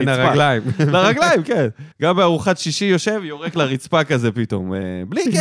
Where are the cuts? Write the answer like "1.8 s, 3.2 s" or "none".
1.9 s